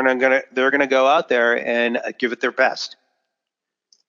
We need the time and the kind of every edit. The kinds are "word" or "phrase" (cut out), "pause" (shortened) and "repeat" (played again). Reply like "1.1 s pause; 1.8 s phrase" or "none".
none